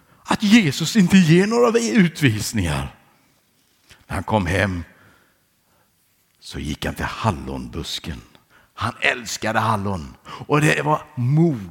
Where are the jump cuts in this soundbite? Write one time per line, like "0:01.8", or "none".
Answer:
none